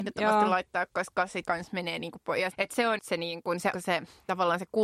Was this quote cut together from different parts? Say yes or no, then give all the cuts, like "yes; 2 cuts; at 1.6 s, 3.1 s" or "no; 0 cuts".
yes; 4 cuts; at 1.4 s, 2.5 s, 3.0 s, 3.7 s